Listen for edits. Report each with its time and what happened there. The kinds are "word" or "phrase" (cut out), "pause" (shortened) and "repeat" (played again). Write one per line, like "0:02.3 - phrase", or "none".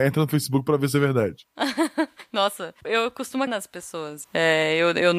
0:02.8 - word
0:03.5 - word
0:04.2 - word